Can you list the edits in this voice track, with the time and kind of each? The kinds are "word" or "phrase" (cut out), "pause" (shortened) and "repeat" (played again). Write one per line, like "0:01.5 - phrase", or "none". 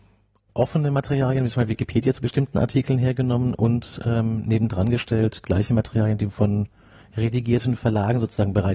none